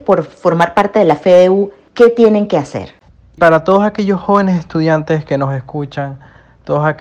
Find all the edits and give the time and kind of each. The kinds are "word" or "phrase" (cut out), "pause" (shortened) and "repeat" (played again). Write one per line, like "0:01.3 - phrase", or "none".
none